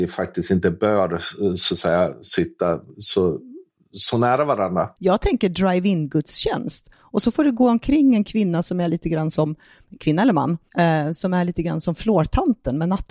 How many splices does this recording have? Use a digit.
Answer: 0